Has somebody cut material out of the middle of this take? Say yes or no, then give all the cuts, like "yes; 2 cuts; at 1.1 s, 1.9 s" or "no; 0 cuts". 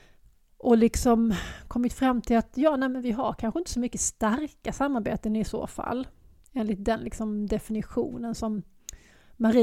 no; 0 cuts